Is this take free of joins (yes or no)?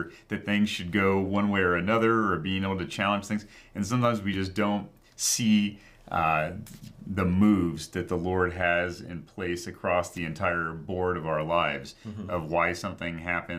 yes